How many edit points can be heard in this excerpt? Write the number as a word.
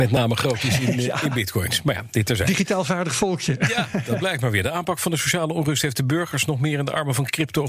zero